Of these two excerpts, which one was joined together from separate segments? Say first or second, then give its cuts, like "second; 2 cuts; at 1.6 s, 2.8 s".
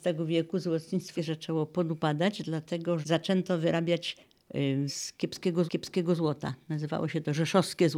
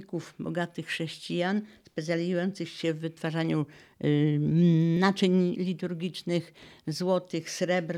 first; 4 cuts; at 1.2 s, 3.0 s, 4.9 s, 5.7 s